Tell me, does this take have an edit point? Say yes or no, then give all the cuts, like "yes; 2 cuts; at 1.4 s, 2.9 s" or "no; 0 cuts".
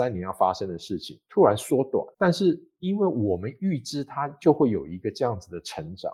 yes; 1 cut; at 2.1 s